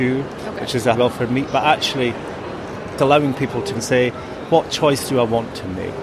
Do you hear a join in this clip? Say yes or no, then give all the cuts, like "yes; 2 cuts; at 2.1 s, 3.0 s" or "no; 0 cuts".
yes; 4 cuts; at 0.9 s, 3.0 s, 3.8 s, 4.5 s